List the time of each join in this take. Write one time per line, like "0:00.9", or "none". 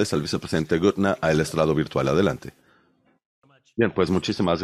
none